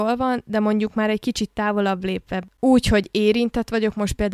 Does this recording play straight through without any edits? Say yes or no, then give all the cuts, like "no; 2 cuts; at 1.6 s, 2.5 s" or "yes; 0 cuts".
yes; 0 cuts